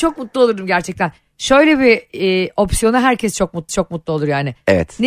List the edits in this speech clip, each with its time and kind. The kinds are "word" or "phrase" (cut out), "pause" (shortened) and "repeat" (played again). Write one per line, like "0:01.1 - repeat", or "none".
0:03.7 - repeat